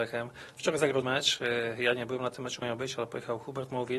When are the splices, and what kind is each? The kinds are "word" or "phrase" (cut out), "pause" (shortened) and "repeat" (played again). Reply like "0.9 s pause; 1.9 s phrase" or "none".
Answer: 1.0 s word; 2.6 s word